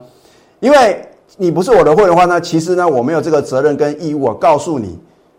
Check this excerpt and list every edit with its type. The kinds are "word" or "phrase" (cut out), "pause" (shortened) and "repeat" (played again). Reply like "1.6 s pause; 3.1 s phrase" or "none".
none

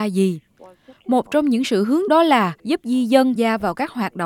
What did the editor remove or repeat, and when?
2.1 s word; 2.6 s pause; 3.4 s word

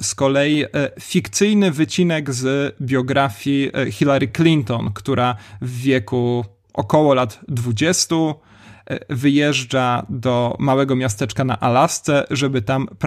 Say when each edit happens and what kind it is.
none

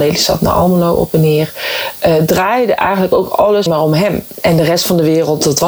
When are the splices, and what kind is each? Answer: 3.7 s word

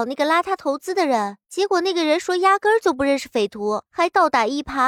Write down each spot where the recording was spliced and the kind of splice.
1.4 s pause; 3.9 s pause

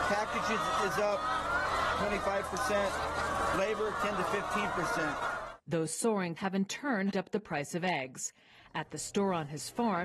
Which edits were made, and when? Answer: 2.0 s phrase; 6.4 s word; 7.1 s word

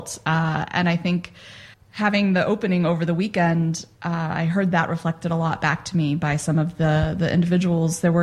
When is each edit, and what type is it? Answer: 1.7 s pause

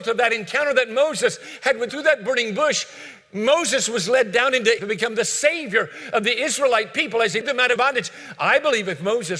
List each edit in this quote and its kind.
1.9 s word; 4.8 s word; 7.4 s word; 7.8 s word

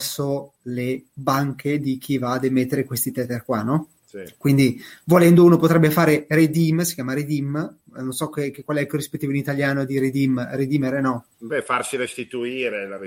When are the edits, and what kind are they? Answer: 4.0 s pause; 7.9 s pause; 11.3 s pause

